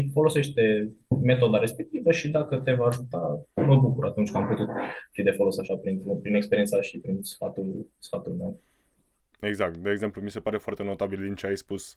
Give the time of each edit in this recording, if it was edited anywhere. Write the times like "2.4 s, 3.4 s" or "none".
none